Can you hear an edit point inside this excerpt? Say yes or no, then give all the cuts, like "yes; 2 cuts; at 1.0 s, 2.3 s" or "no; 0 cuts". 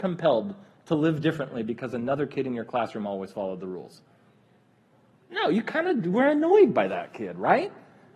no; 0 cuts